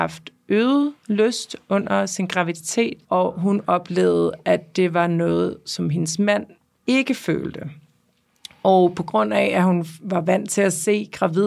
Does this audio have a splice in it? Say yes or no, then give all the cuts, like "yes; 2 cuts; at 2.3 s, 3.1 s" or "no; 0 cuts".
yes; 1 cut; at 3.0 s